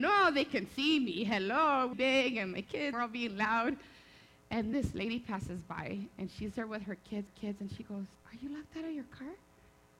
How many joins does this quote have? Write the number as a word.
five